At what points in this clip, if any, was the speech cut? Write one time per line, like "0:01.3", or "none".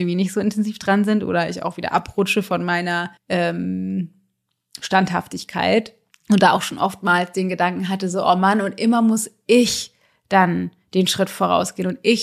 0:03.2
0:06.1